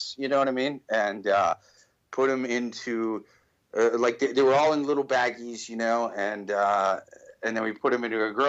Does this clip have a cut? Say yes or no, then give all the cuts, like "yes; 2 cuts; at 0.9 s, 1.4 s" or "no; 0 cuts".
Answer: no; 0 cuts